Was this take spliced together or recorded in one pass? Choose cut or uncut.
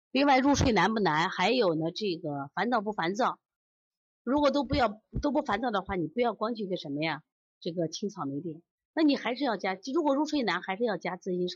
uncut